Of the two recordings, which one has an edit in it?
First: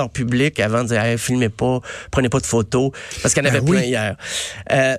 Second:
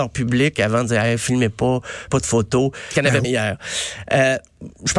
second; 3 cuts; at 2.1 s, 2.9 s, 3.2 s

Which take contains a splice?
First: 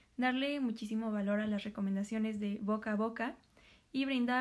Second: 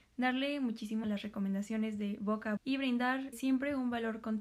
second; 3 cuts; at 1.0 s, 2.6 s, 3.3 s

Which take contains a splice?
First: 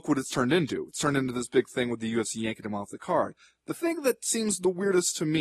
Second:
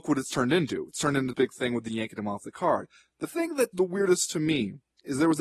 second; 3 cuts; at 1.3 s, 1.9 s, 3.7 s

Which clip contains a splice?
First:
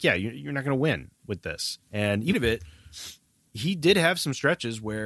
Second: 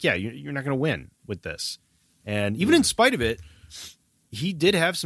first; 2 cuts; at 1.8 s, 2.3 s

